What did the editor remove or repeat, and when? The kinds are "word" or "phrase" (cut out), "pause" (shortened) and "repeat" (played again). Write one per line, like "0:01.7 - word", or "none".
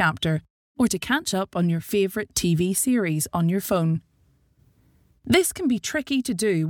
none